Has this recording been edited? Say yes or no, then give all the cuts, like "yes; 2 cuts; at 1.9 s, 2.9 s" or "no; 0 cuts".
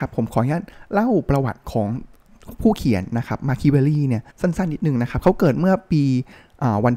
yes; 1 cut; at 4.3 s